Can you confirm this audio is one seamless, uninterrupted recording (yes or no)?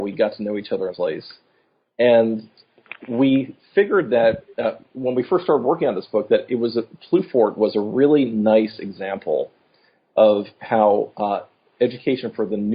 no